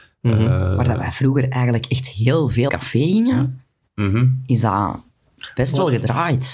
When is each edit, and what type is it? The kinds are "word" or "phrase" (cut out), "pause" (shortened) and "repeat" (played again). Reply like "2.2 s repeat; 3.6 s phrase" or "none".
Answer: 2.7 s word